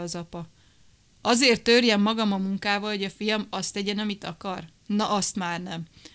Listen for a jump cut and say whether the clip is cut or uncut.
uncut